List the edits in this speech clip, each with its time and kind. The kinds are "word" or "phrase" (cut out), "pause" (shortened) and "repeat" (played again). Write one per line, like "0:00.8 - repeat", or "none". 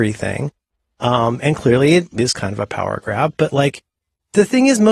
none